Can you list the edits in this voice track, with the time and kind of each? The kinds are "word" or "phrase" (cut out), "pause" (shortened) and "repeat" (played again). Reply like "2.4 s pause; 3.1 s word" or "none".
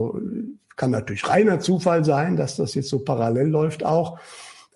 none